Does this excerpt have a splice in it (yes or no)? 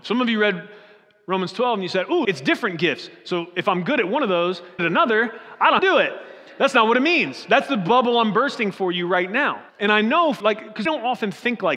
yes